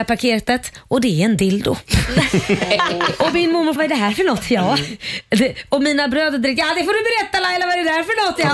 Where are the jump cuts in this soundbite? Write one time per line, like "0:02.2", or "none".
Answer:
0:03.8